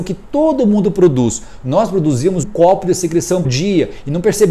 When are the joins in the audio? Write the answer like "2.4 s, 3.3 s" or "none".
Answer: 2.4 s, 3.4 s